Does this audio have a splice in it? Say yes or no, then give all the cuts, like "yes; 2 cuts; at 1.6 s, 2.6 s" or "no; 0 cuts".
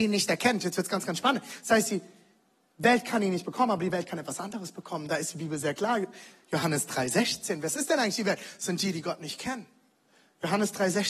no; 0 cuts